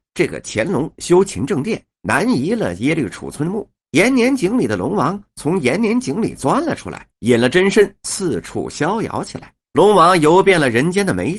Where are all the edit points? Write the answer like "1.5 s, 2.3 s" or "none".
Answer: 1.9 s, 3.8 s, 7.1 s, 9.6 s